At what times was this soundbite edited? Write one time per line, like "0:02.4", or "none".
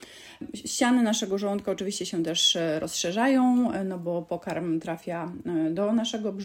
none